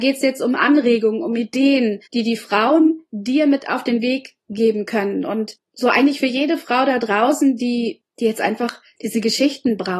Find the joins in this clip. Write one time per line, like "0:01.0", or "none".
0:02.1
0:05.6